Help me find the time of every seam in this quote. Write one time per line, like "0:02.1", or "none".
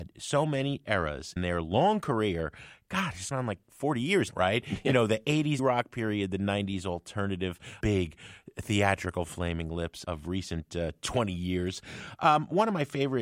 0:01.4
0:03.3
0:04.3
0:05.6
0:07.8
0:10.0